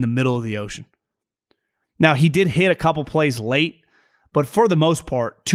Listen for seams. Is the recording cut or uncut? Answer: uncut